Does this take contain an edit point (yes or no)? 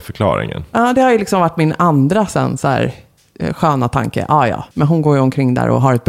yes